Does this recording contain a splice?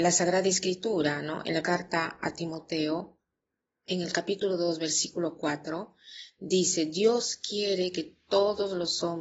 yes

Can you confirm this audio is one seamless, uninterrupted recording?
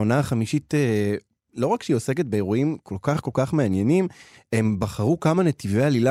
yes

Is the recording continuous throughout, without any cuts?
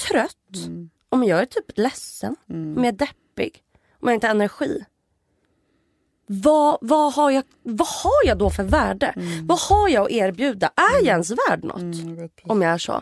yes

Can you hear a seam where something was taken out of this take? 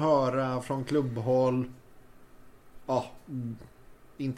no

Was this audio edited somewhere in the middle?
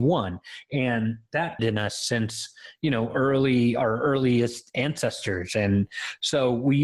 yes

